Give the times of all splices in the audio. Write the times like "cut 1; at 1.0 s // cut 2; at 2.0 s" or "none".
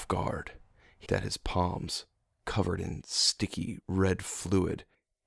cut 1; at 1.1 s